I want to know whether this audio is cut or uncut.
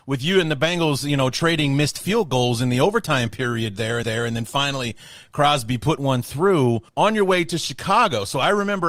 cut